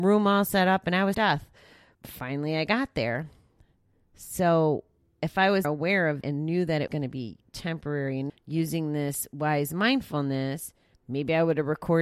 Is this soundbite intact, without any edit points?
no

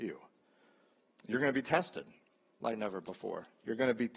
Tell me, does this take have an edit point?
no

